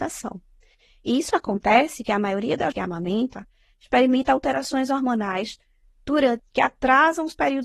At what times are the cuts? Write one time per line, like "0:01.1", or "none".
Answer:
0:02.0
0:02.7
0:06.4